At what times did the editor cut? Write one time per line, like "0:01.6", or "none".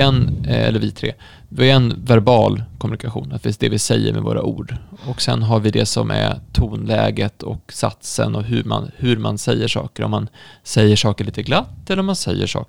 none